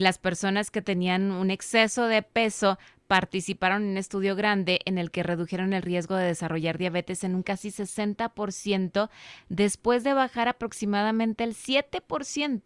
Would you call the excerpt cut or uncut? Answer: uncut